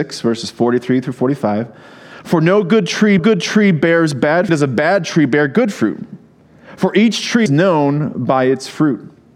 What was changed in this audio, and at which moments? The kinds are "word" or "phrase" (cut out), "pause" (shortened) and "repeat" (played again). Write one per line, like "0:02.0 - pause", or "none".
0:03.2 - repeat
0:04.5 - phrase
0:07.5 - word

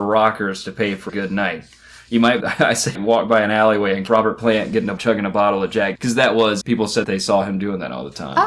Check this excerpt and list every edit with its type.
0:01.1 - word
0:02.4 - word
0:03.0 - word
0:04.1 - word
0:05.0 - word
0:06.0 - word
0:06.6 - word
0:07.0 - word

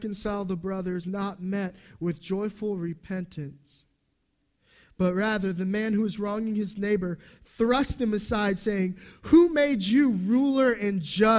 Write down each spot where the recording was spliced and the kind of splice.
0:01.0 - word

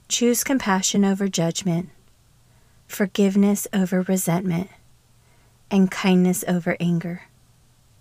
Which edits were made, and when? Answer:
none

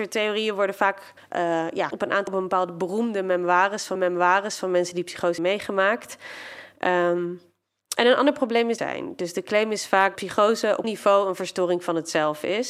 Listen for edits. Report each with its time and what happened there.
0:01.2 - pause
0:01.9 - word
0:02.3 - word
0:04.0 - repeat
0:05.4 - word
0:08.8 - phrase
0:10.2 - word
0:10.8 - word

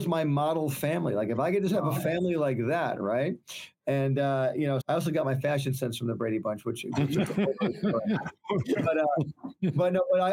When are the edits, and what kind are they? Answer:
0:04.8 - word

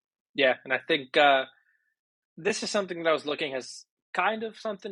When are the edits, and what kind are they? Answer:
none

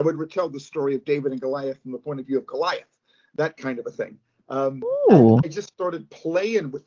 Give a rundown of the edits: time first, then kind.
none

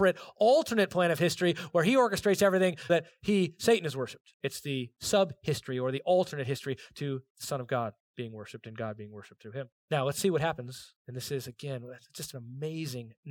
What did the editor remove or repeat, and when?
0:02.9 - word
0:04.3 - pause
0:09.8 - pause
0:11.0 - pause

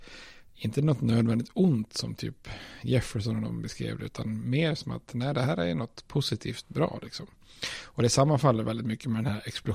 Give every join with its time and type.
none

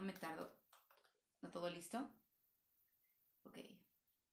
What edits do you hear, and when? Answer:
0:01.5 - phrase

